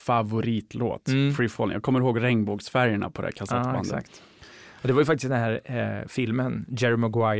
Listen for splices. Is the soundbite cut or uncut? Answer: uncut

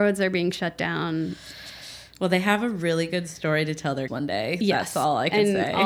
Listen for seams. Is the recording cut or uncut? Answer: cut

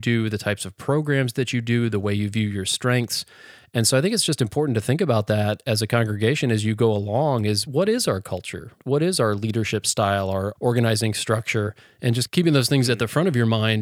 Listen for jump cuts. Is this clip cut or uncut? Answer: uncut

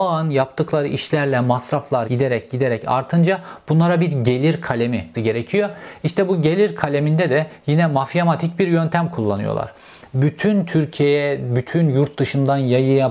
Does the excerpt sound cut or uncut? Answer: cut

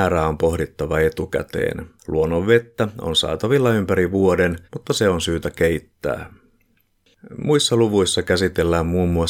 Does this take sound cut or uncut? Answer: cut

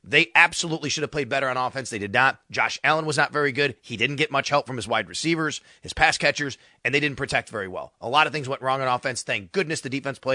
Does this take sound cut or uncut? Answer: uncut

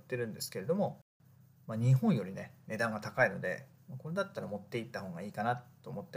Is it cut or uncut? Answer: uncut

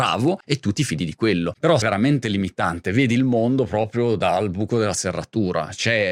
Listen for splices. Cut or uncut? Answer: cut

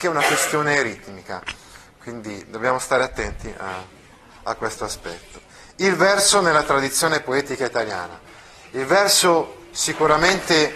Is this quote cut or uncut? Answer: uncut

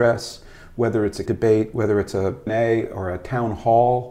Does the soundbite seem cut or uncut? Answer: cut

